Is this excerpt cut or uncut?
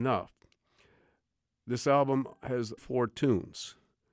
cut